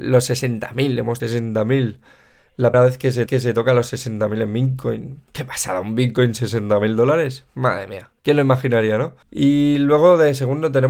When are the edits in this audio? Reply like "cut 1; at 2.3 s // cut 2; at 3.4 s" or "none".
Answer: cut 1; at 1.2 s // cut 2; at 2.7 s // cut 3; at 3.3 s // cut 4; at 5.3 s // cut 5; at 8.2 s // cut 6; at 9.2 s